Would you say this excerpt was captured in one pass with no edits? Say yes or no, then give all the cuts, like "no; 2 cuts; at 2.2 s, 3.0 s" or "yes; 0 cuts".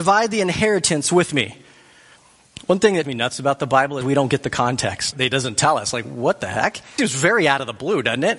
no; 4 cuts; at 3.0 s, 4.0 s, 5.1 s, 7.0 s